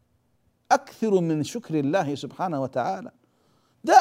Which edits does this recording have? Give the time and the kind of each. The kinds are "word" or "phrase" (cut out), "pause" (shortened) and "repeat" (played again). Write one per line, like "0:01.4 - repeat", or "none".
none